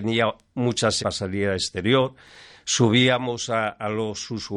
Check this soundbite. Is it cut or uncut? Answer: cut